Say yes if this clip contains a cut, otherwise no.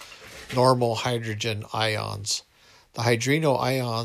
no